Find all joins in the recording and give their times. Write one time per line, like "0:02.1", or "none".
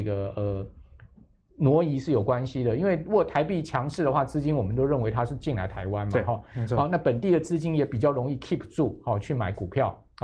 none